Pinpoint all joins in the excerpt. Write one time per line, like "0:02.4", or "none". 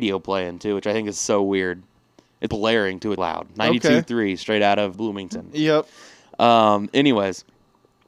0:02.5
0:03.2
0:04.9

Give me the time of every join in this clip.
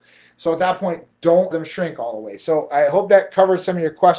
0:01.5

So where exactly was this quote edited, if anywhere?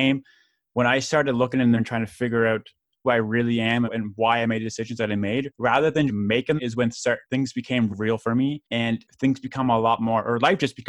0:01.8
0:03.0
0:03.8
0:06.1
0:06.6
0:07.9

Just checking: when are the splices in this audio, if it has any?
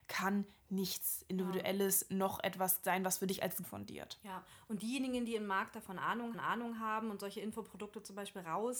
0:03.6
0:06.3

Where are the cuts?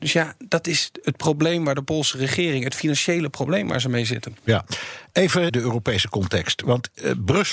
0:05.5

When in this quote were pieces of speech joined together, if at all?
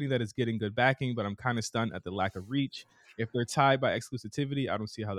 none

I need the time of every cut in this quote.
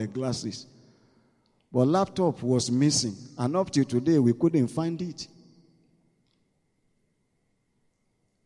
none

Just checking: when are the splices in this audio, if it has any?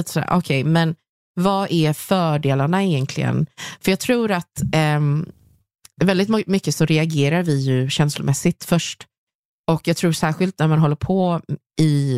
none

